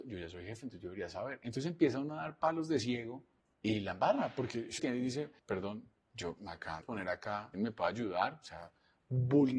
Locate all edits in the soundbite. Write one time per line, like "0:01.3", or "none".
0:03.4
0:04.8
0:05.4
0:06.8
0:07.5